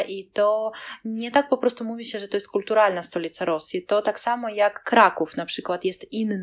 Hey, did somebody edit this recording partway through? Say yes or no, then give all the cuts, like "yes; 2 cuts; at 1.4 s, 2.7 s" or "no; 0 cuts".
no; 0 cuts